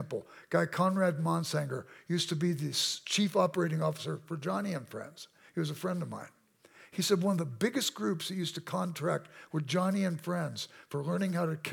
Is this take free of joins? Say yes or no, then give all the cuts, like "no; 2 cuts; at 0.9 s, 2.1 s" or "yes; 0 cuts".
yes; 0 cuts